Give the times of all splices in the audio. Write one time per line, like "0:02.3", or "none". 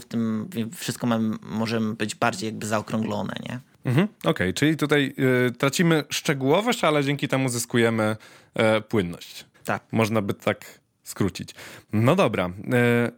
0:09.5